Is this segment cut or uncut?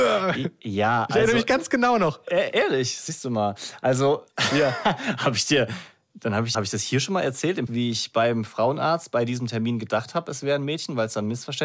cut